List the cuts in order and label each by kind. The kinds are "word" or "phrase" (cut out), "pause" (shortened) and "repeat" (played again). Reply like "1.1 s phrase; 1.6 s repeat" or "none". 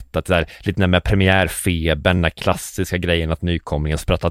none

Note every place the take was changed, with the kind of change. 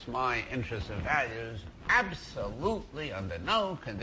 none

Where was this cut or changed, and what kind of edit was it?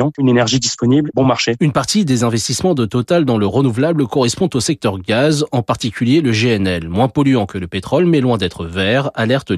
none

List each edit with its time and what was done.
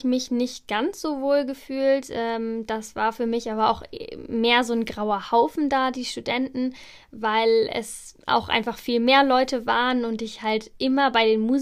none

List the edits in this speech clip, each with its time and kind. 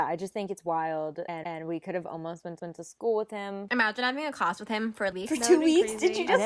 1.4 s repeat; 2.6 s repeat; 5.1 s phrase

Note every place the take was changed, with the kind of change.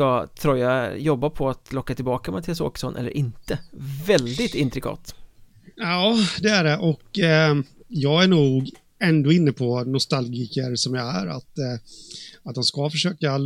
none

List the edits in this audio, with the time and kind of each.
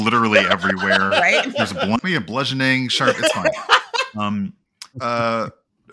2.0 s phrase; 4.9 s phrase

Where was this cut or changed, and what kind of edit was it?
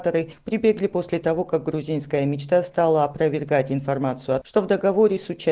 4.4 s word

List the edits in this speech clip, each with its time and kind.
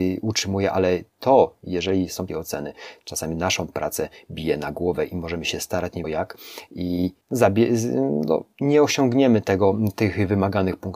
1.1 s pause; 2.3 s phrase; 6.0 s word; 7.2 s pause

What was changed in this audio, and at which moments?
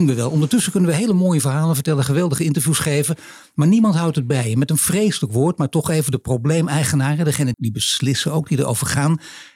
7.5 s word

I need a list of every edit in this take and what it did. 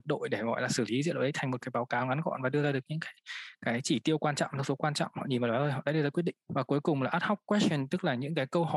6.4 s pause

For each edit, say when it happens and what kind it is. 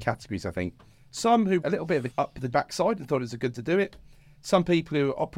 1.6 s word; 2.1 s word; 2.5 s word; 3.5 s word

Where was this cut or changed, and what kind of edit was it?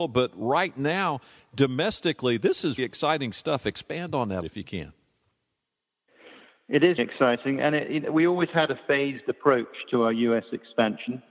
2.8 s word; 4.4 s phrase; 7.0 s word

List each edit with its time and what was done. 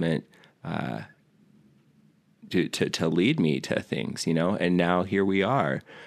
none

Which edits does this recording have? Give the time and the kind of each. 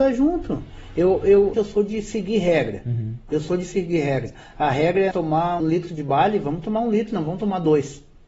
1.5 s phrase; 5.1 s word; 5.6 s word

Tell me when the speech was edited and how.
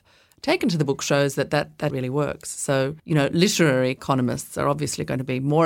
1.9 s phrase; 3.0 s pause

